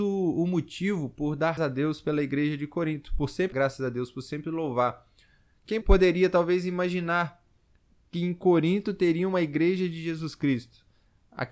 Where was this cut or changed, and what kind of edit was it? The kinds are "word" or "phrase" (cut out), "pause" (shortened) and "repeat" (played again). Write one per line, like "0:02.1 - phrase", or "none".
0:01.6 - word
0:03.5 - word
0:05.8 - word